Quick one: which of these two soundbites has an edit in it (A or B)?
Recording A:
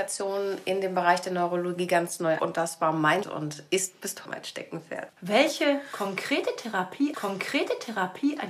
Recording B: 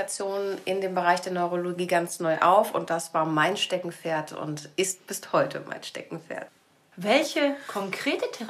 A